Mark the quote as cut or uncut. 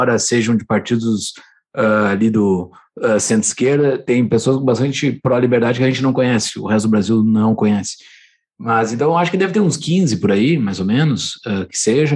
uncut